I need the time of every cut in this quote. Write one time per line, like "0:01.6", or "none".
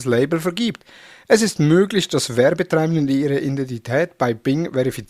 none

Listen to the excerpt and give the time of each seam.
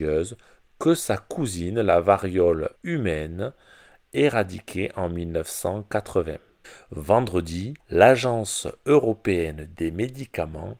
0:02.8
0:07.8

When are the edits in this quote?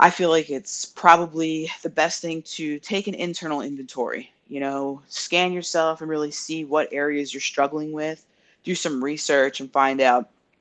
none

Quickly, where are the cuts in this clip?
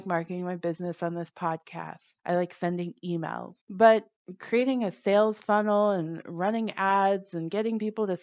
0:02.2
0:03.6

